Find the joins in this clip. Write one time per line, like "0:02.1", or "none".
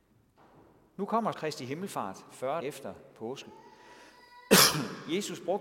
0:01.3
0:02.6